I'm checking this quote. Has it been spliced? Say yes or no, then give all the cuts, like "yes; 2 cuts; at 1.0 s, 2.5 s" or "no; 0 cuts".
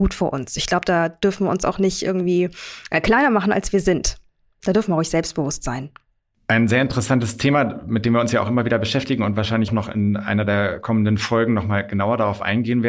yes; 1 cut; at 9.7 s